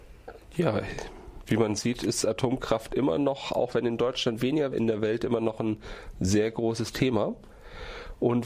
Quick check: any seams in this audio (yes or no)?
yes